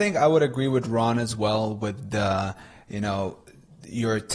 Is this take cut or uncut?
uncut